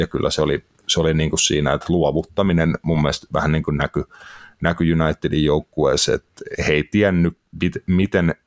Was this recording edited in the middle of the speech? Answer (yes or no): no